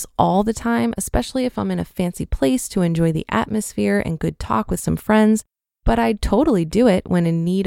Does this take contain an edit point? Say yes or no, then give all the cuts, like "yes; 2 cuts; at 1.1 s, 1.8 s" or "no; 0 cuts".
no; 0 cuts